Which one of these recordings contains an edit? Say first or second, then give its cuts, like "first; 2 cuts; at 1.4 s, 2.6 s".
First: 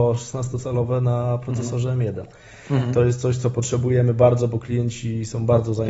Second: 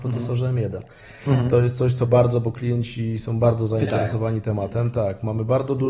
second; 1 cut; at 2.1 s